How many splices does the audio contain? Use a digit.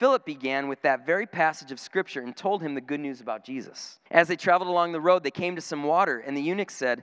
1